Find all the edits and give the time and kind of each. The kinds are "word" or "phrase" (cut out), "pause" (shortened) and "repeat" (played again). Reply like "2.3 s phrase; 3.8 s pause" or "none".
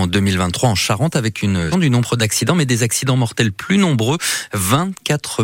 1.7 s word